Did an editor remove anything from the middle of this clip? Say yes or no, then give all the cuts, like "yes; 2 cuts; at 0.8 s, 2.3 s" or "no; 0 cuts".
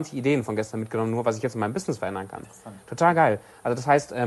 no; 0 cuts